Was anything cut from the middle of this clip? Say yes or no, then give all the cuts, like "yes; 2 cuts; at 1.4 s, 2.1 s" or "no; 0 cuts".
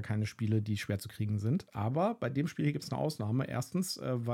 no; 0 cuts